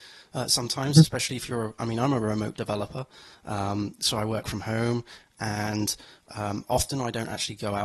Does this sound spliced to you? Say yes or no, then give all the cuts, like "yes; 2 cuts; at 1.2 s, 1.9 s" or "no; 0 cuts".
no; 0 cuts